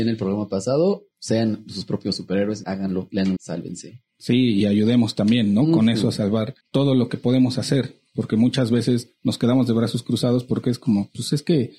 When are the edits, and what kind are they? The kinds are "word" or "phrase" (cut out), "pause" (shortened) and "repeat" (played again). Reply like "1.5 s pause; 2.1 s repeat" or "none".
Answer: 1.1 s pause; 2.6 s word; 3.4 s word; 6.6 s pause

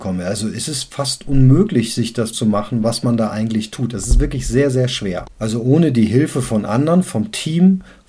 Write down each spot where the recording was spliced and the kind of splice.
2.3 s word; 5.3 s pause

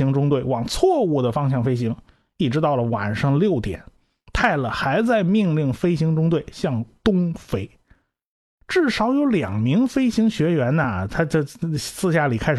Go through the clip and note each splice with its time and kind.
none

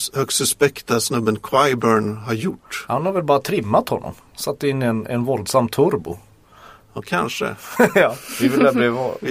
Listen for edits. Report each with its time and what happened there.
none

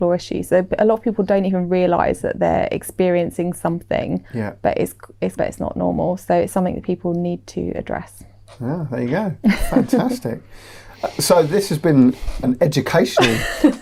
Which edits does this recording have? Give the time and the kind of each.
4.3 s pause; 5.4 s word; 12.4 s word

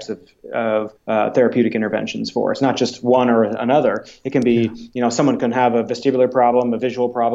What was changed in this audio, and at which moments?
1.0 s pause

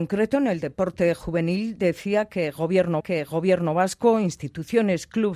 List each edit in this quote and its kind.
3.0 s repeat

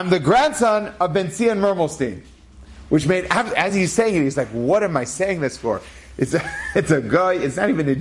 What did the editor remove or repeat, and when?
none

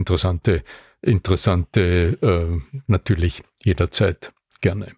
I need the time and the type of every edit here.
2.8 s word

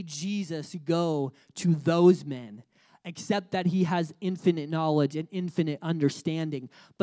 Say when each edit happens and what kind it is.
none

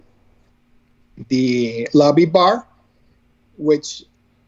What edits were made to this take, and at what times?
none

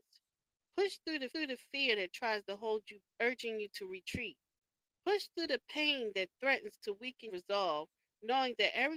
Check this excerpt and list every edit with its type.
1.3 s repeat; 3.0 s word; 7.3 s word

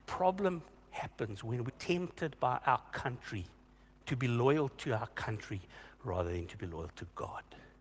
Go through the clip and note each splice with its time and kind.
1.7 s word; 3.8 s pause

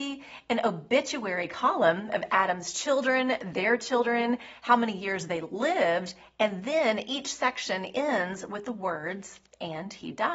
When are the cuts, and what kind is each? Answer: none

